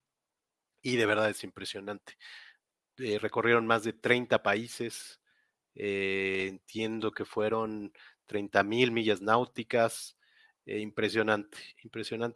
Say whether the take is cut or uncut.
uncut